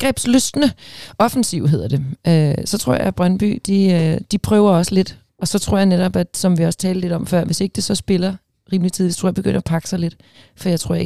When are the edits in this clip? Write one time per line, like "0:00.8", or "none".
none